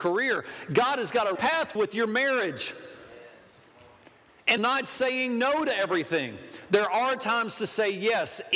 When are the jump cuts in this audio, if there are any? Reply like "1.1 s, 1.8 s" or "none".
1.4 s, 1.8 s, 4.6 s